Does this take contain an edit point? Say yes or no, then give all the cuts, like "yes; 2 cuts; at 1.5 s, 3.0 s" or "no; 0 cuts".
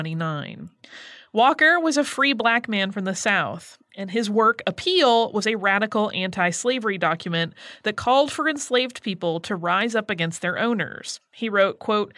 no; 0 cuts